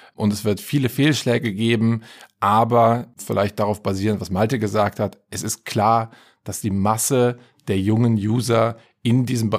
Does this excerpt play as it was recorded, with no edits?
yes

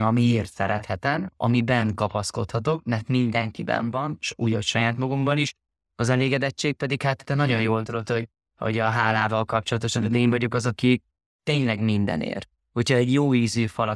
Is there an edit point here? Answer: no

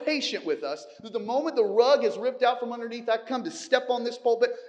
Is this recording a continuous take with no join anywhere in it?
yes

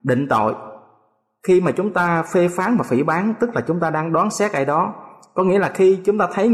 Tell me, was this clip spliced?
no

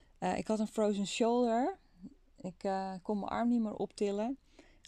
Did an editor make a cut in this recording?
no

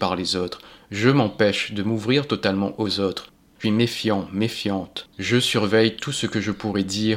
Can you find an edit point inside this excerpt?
yes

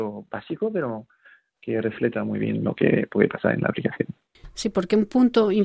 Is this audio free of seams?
yes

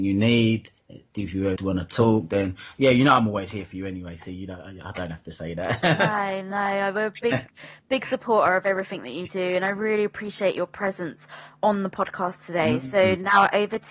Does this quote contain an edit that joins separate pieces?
yes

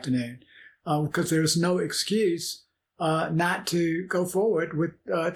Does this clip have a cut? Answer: no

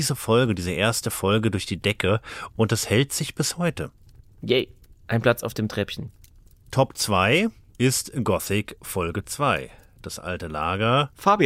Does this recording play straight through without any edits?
yes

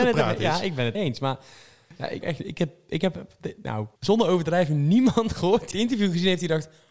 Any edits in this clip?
yes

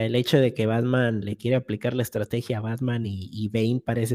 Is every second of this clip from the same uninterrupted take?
yes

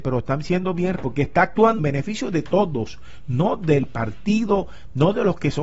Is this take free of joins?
no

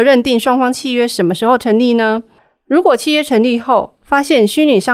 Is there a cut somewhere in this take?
no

